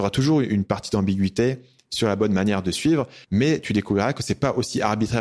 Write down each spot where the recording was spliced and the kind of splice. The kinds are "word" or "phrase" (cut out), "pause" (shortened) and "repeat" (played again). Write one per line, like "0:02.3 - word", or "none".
0:03.2 - pause